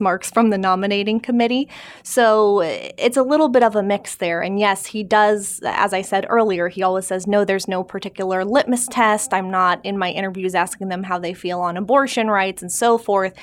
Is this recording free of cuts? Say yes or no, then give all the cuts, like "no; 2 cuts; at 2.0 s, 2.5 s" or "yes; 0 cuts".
yes; 0 cuts